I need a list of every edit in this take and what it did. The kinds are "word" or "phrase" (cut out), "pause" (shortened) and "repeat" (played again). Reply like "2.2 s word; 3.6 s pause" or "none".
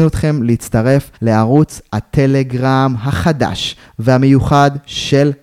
1.1 s pause